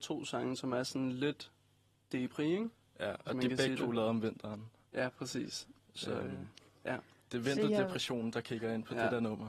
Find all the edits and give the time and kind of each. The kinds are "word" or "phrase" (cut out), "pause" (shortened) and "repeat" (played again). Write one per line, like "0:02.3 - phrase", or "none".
none